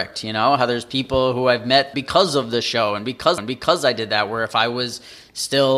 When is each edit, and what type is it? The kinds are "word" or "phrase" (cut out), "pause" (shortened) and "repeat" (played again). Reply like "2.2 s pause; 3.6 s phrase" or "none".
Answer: 1.9 s word; 3.4 s repeat